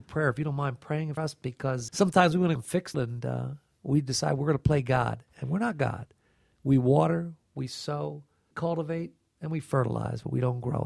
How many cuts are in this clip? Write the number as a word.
five